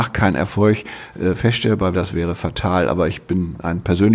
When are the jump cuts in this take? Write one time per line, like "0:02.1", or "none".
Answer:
0:01.9